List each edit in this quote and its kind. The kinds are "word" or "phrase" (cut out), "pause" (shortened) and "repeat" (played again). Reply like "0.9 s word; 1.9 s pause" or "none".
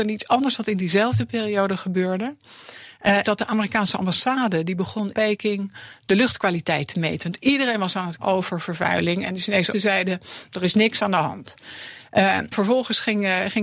3.2 s word; 5.1 s word; 8.2 s word; 9.7 s word; 12.5 s word